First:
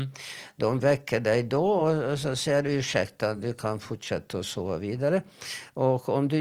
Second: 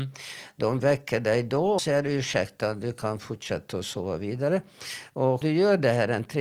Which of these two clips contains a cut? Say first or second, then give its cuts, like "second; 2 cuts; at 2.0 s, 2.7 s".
second; 2 cuts; at 1.8 s, 5.4 s